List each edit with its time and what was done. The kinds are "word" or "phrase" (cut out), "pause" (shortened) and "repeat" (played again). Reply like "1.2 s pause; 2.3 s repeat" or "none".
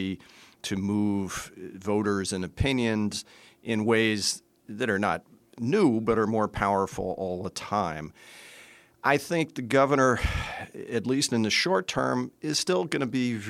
none